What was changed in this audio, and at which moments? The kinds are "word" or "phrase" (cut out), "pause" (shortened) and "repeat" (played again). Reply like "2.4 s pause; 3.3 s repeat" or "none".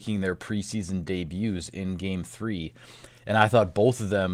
none